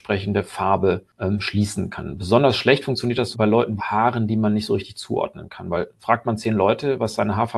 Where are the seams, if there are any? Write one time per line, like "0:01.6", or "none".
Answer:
0:03.3
0:03.8